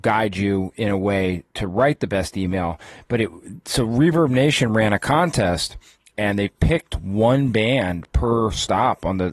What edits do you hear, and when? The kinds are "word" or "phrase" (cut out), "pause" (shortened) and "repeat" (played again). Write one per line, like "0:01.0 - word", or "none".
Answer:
none